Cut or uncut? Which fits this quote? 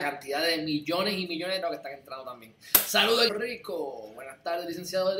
cut